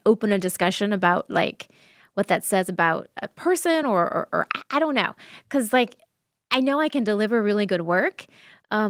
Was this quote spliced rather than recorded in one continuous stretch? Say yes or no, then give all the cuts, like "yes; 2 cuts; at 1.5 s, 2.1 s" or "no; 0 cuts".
no; 0 cuts